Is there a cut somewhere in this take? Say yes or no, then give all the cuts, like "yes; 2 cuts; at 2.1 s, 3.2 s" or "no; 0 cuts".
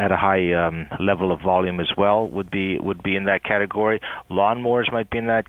no; 0 cuts